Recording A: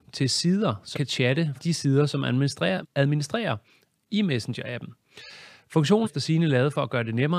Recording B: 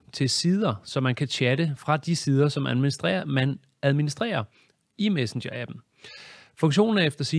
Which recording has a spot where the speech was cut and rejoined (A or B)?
A